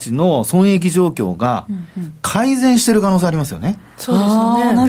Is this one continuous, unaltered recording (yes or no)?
yes